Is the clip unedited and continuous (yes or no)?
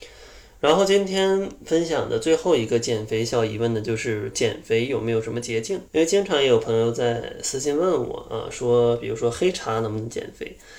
no